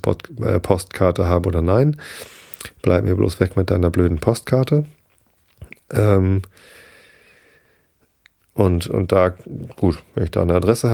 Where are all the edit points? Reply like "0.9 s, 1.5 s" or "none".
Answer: none

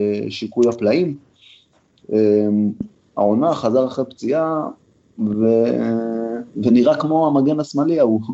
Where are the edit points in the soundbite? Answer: none

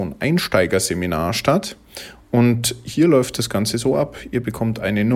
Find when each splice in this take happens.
none

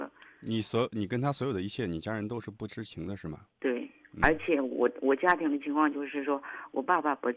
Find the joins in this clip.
3.5 s

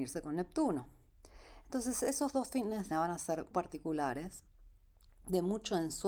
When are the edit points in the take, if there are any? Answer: 2.9 s, 3.5 s

